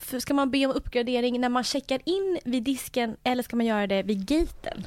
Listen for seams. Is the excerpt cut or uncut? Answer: cut